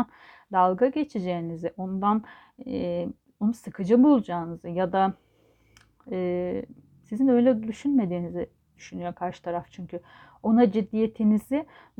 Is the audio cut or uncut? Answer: uncut